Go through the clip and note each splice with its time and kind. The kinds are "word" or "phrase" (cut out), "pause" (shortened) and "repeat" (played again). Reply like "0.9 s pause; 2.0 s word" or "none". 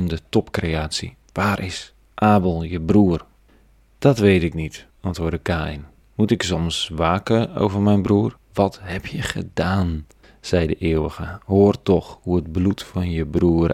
1.2 s pause; 3.5 s pause; 4.9 s pause; 6.0 s pause; 8.4 s pause; 10.2 s pause